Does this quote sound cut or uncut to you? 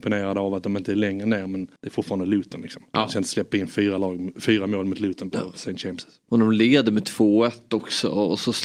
cut